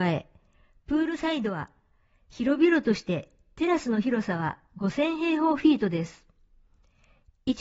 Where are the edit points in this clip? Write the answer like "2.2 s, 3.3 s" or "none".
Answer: none